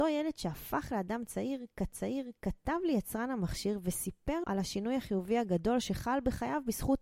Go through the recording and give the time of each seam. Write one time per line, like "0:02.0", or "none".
0:01.9
0:04.4